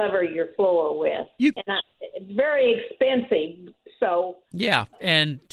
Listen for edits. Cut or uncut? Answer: cut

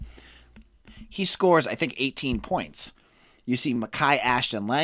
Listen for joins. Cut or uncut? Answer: uncut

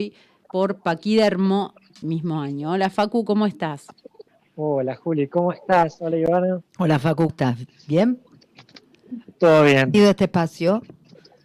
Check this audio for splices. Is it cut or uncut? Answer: cut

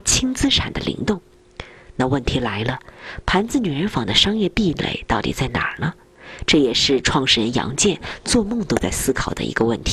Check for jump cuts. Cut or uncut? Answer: uncut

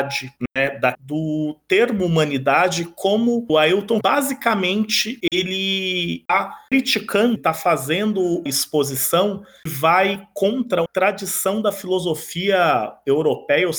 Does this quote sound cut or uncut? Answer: cut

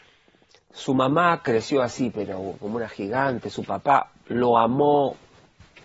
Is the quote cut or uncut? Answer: uncut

